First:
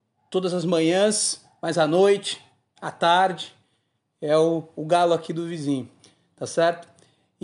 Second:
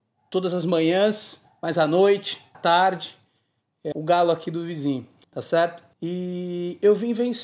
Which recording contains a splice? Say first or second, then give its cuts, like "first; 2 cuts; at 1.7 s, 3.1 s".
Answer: second; 4 cuts; at 2.5 s, 3.9 s, 5.2 s, 5.9 s